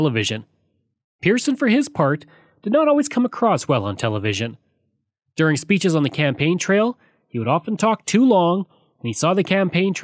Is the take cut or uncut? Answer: uncut